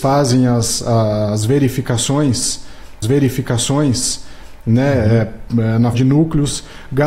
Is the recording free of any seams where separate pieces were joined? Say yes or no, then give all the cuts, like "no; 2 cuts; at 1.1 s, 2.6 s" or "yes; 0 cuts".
no; 2 cuts; at 3.0 s, 5.9 s